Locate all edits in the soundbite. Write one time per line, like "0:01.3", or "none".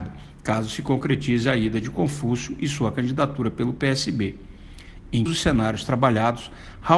0:05.3